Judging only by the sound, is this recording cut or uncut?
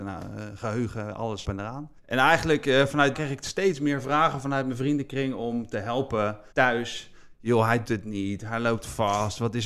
cut